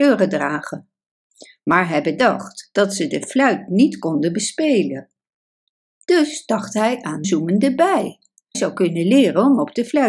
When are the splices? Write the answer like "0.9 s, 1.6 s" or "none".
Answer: 7.2 s, 8.5 s